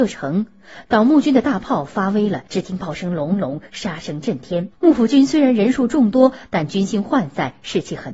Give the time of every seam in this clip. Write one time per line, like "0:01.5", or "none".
0:02.5
0:04.7